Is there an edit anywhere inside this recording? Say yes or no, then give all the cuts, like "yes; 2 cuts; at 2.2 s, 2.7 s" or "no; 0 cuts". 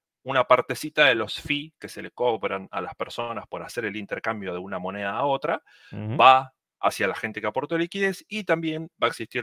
no; 0 cuts